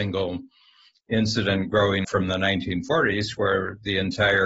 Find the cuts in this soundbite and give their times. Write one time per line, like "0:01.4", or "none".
0:02.0